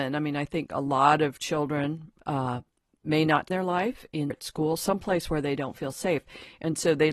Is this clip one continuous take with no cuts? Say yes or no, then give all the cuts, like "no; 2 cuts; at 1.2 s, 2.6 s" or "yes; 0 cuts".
no; 3 cuts; at 2.2 s, 3.5 s, 4.3 s